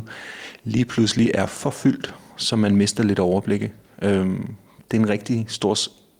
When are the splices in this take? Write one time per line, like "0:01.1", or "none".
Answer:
none